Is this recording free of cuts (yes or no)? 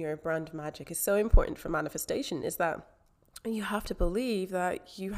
yes